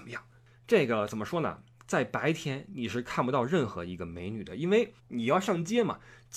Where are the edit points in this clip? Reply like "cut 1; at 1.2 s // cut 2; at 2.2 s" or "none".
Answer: cut 1; at 5.0 s